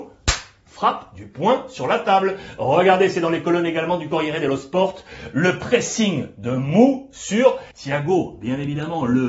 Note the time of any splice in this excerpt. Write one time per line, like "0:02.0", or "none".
0:07.7